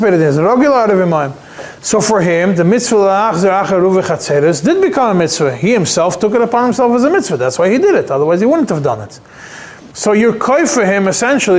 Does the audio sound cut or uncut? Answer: cut